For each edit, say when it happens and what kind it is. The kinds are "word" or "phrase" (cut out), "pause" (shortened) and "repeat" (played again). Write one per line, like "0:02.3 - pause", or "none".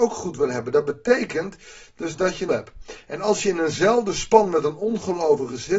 0:02.5 - phrase